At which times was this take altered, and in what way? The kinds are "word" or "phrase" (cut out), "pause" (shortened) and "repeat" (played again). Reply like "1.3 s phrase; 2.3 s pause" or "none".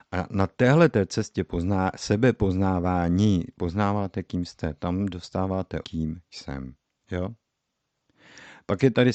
5.8 s word; 6.8 s pause